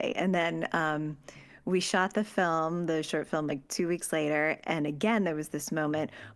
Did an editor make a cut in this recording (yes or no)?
no